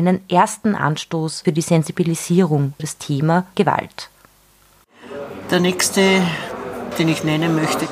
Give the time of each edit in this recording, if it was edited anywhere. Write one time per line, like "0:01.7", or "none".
0:01.4
0:02.8
0:03.5
0:06.9